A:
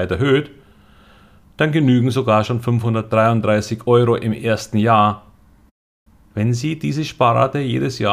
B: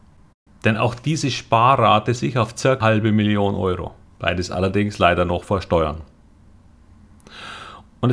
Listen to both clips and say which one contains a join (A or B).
B